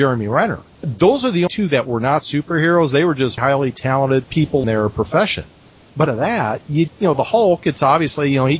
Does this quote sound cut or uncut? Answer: cut